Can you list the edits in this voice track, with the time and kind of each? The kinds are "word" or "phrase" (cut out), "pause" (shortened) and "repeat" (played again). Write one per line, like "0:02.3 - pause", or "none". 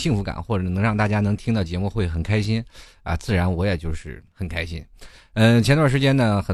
none